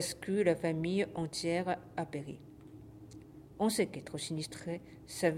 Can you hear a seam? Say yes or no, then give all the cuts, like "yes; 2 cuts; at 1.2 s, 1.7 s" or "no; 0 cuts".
no; 0 cuts